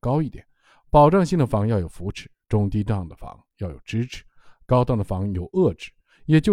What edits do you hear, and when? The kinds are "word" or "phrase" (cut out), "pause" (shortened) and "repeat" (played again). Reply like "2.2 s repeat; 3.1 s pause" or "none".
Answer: none